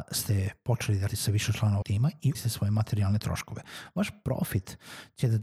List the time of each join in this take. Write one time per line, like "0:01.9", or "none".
0:01.1
0:01.8
0:02.3